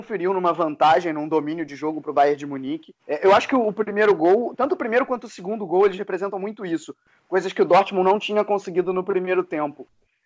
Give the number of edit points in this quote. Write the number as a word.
one